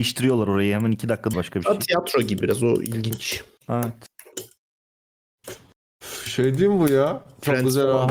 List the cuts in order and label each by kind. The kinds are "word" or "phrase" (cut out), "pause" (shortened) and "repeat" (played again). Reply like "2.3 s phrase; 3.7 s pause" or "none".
1.3 s word; 2.4 s word